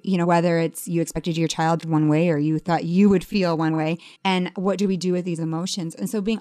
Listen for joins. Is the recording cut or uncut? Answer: cut